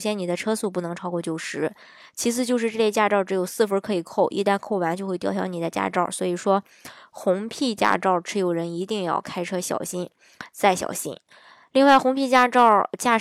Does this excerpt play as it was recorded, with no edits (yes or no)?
yes